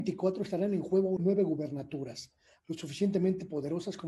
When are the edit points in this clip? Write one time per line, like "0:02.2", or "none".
0:01.2
0:02.6